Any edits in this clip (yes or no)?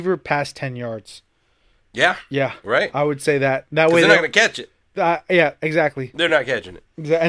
no